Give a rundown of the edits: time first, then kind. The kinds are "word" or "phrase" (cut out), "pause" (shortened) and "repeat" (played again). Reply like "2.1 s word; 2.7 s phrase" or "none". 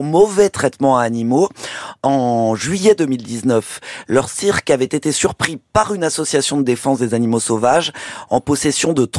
none

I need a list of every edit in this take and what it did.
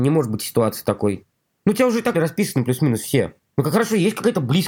2.1 s word

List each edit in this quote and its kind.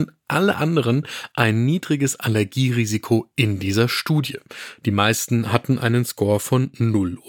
none

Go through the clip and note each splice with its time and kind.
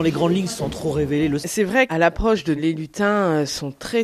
1.4 s phrase; 1.9 s word; 2.6 s phrase

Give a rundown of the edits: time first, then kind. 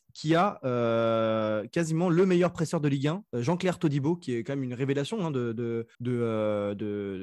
3.3 s pause; 5.9 s pause

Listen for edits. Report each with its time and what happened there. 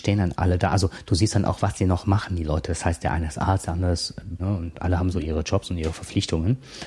4.4 s phrase

